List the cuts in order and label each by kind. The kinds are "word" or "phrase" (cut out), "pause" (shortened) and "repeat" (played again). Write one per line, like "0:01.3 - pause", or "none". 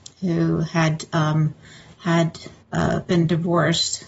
0:02.6 - pause